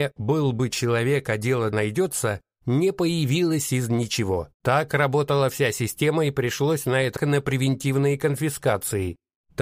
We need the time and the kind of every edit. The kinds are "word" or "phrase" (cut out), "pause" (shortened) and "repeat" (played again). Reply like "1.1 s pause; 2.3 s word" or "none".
1.7 s phrase; 4.5 s pause; 7.2 s phrase